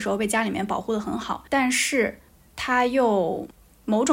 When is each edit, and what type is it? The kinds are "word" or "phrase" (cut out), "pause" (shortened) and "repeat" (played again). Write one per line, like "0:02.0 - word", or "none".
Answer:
0:01.5 - pause
0:02.3 - pause